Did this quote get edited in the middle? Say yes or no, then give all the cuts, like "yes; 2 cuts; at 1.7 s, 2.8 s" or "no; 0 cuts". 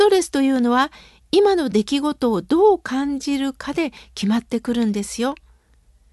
no; 0 cuts